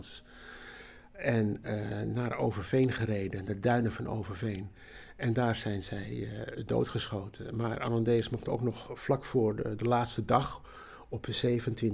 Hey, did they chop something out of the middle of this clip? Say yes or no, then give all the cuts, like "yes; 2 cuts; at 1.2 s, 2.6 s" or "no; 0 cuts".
no; 0 cuts